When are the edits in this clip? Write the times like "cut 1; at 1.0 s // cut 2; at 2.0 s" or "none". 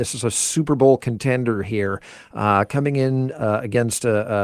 none